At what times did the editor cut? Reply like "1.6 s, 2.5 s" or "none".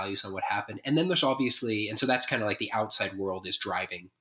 none